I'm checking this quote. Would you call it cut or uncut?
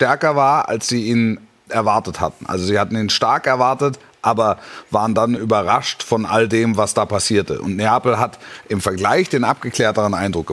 uncut